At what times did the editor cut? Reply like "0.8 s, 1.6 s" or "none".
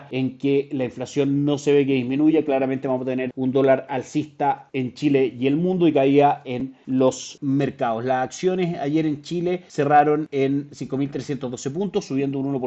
none